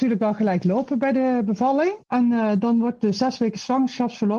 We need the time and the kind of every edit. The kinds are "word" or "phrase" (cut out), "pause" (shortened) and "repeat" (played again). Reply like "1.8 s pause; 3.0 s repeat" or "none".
2.0 s pause